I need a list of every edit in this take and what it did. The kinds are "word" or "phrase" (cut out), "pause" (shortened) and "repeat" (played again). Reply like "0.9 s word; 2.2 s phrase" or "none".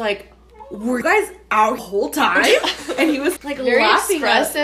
1.0 s word; 1.8 s phrase; 3.4 s word